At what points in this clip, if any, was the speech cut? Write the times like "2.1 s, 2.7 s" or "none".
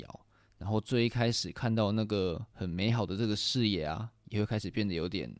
4.2 s